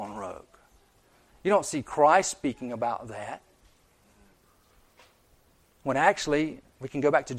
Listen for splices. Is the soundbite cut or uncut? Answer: uncut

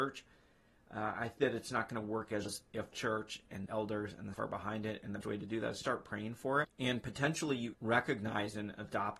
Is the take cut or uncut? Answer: cut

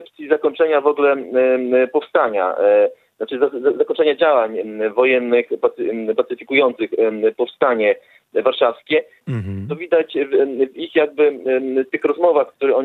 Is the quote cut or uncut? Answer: uncut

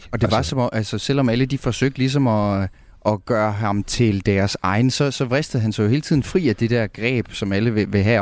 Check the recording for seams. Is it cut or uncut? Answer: uncut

